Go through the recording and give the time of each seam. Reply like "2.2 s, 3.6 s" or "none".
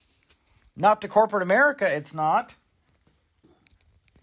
none